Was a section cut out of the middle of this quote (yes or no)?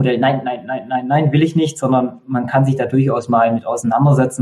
no